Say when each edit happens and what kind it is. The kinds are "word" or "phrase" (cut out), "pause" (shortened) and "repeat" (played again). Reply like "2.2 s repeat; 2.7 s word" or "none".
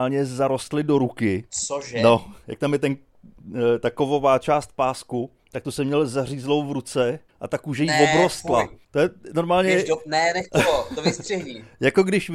1.5 s pause; 5.4 s pause; 7.3 s pause; 8.8 s pause